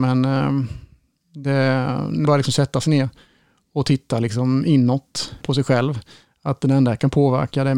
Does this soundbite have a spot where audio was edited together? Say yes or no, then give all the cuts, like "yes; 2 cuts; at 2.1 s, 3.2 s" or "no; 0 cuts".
yes; 2 cuts; at 2.2 s, 5.4 s